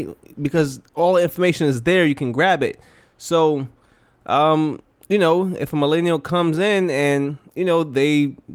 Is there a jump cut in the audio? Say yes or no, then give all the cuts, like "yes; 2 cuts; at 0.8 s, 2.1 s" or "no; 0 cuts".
no; 0 cuts